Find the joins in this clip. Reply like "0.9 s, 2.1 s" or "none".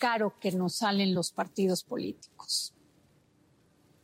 none